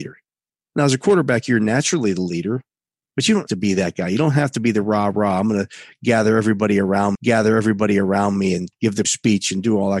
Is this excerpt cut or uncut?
cut